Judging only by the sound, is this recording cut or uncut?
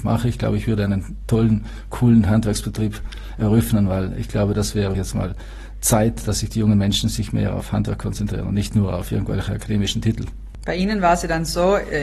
cut